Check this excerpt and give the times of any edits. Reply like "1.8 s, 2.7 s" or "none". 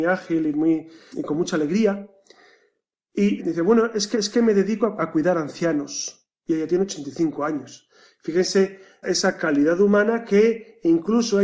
1.1 s, 3.4 s, 4.1 s, 5.0 s, 6.3 s, 9.0 s